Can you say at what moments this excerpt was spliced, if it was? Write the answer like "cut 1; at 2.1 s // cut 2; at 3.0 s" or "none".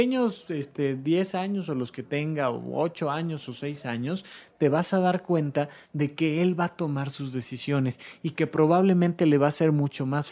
none